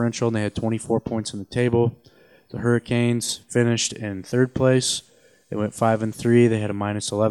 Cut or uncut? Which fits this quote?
uncut